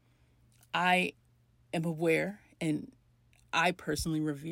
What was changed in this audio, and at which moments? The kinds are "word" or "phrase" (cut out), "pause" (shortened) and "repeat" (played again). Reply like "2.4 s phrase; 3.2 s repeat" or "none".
none